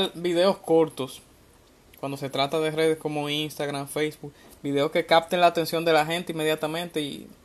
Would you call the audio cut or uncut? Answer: uncut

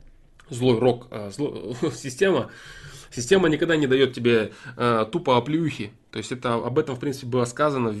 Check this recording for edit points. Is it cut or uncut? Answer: uncut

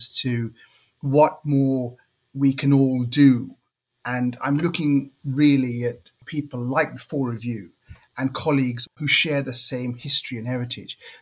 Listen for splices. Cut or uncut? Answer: uncut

